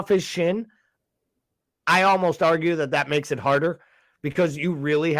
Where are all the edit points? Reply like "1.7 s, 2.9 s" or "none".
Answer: none